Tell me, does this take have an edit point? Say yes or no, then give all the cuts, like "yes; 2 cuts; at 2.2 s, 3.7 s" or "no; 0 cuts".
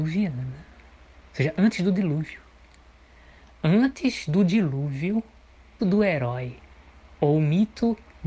yes; 1 cut; at 5.8 s